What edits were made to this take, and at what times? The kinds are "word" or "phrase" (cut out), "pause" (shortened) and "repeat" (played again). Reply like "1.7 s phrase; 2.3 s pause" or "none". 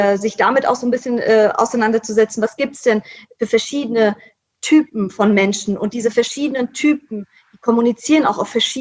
none